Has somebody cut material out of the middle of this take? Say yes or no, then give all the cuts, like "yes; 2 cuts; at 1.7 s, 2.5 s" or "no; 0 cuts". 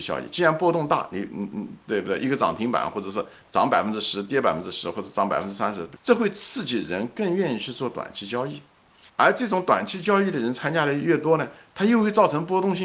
yes; 2 cuts; at 6.0 s, 9.1 s